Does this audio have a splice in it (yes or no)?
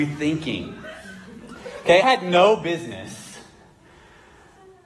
yes